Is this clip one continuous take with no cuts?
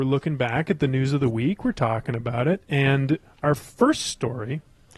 yes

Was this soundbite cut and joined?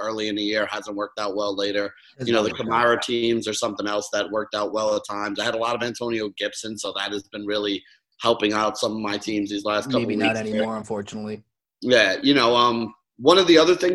no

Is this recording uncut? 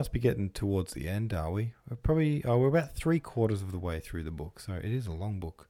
yes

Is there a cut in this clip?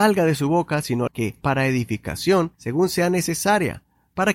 yes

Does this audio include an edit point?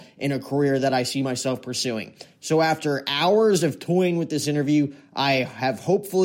no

